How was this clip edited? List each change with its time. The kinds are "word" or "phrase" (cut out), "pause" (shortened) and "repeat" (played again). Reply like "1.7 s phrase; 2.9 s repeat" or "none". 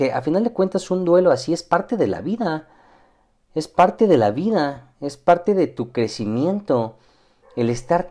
none